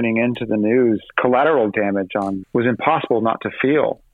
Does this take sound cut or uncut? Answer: cut